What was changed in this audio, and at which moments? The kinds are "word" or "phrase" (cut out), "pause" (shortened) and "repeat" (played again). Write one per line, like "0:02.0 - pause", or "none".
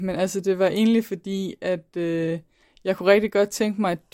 none